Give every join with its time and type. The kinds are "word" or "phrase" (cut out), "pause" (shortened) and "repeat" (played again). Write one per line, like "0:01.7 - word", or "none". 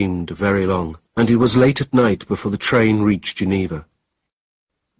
0:01.1 - pause